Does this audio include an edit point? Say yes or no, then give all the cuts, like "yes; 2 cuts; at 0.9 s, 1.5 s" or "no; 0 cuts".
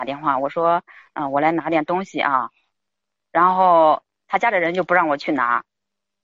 no; 0 cuts